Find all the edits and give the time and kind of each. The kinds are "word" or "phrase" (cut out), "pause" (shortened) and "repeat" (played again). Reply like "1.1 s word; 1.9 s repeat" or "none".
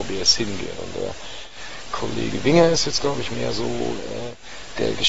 none

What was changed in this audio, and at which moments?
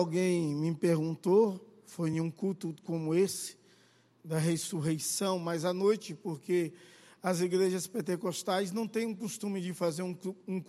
none

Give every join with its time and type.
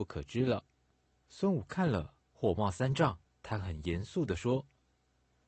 3.2 s pause

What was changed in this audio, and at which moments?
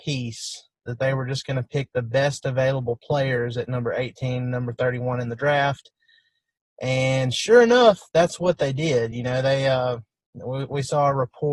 none

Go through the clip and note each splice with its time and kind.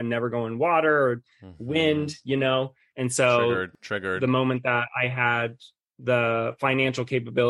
none

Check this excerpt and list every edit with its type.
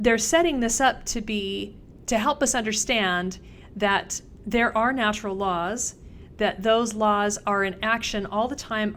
none

